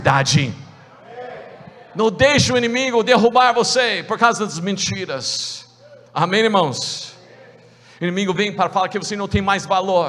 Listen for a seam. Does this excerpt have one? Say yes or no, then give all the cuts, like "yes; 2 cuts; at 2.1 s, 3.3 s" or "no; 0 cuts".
no; 0 cuts